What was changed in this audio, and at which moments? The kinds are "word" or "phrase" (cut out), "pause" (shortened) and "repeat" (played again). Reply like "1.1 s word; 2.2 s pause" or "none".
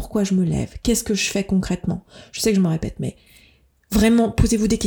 none